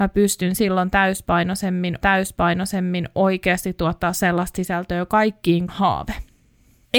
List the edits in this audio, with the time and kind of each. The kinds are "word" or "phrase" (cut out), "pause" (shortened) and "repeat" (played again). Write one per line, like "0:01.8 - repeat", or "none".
0:02.0 - repeat
0:05.7 - phrase